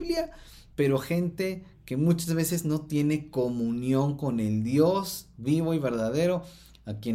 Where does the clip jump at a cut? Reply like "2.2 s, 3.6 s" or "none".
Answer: none